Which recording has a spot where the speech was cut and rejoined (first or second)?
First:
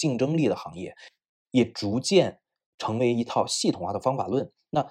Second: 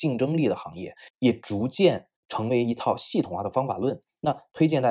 second